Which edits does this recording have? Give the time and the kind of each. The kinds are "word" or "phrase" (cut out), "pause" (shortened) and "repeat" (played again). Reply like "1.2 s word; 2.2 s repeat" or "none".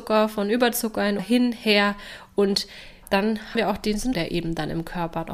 1.2 s word; 3.0 s word; 3.5 s word; 4.1 s word